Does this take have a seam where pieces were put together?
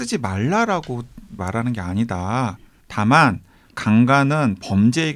yes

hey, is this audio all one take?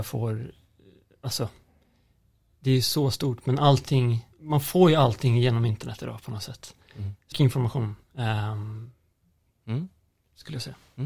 no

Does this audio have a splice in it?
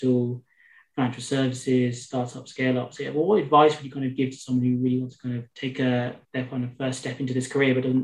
yes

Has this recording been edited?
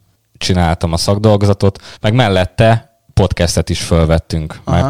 yes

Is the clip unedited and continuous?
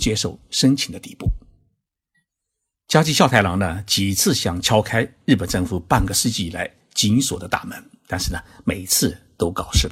yes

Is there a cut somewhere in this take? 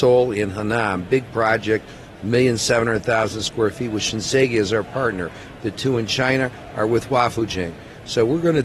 no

